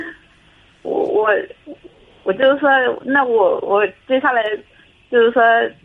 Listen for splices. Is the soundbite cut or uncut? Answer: uncut